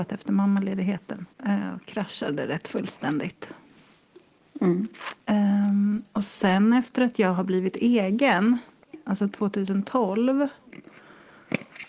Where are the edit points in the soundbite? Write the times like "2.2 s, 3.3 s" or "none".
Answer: 1.3 s, 5.2 s

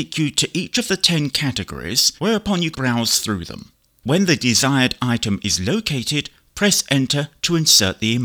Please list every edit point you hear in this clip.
2.2 s, 2.7 s

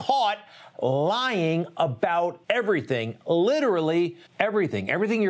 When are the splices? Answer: 2.4 s, 4.3 s

